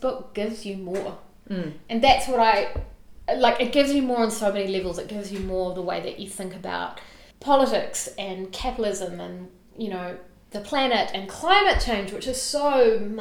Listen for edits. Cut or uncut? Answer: cut